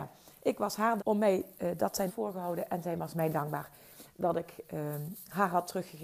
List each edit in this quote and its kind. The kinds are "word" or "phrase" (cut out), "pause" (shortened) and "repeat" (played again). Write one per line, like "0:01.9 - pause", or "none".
0:01.0 - word
0:02.1 - phrase